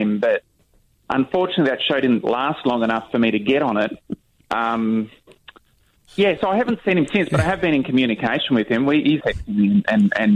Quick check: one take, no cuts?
no; 2 cuts; at 6.1 s, 9.2 s

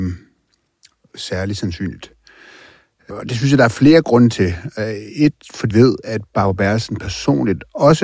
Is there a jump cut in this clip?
yes; 2 cuts; at 3.1 s, 5.7 s

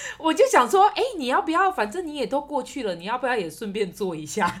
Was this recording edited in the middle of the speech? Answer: no; 0 cuts

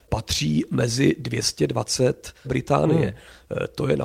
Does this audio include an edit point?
yes; 1 cut; at 2.4 s

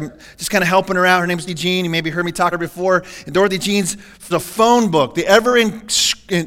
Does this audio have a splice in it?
yes; 3 cuts; at 1.5 s, 2.5 s, 4.3 s

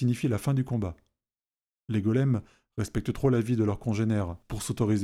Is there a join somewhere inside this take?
no; 0 cuts

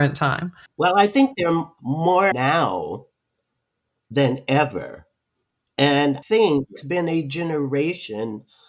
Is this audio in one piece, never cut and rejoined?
no; 3 cuts; at 2.3 s, 6.2 s, 6.8 s

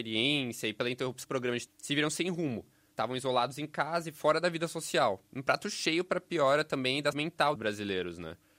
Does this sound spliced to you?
yes; 4 cuts; at 1.2 s, 1.7 s, 7.1 s, 7.6 s

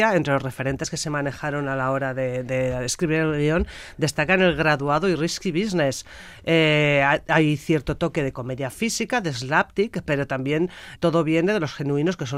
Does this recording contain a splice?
yes; 1 cut; at 11.0 s

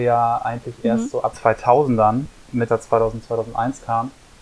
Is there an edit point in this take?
yes; 2 cuts; at 1.3 s, 2.7 s

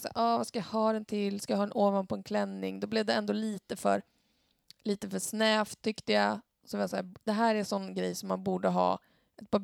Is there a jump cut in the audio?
no; 0 cuts

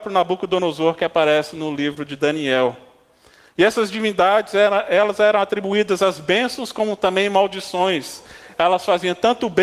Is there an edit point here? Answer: no; 0 cuts

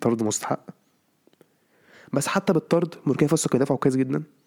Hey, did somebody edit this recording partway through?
no; 0 cuts

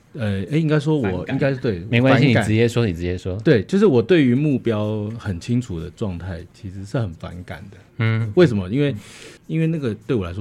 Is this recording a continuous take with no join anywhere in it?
no; 1 cut; at 9.4 s

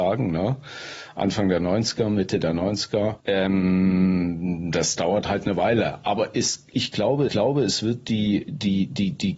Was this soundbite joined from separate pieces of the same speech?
yes; 1 cut; at 7.3 s

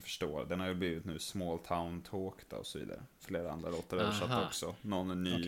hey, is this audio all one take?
yes; 0 cuts

